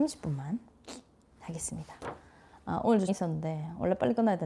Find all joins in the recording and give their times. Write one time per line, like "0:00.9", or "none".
0:03.1